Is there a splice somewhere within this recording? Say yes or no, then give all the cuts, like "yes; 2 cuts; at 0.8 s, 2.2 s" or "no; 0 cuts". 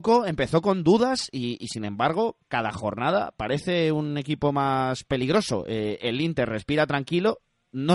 no; 0 cuts